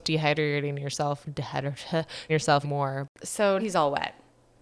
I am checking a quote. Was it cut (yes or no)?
yes